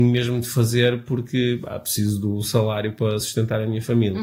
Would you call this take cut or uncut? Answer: uncut